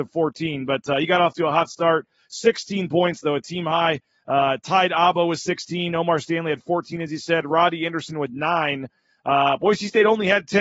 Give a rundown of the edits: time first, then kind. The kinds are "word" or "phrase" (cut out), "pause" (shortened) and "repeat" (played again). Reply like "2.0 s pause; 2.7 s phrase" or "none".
none